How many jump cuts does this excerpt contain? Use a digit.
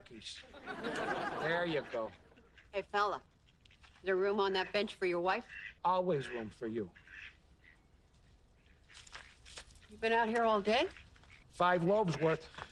3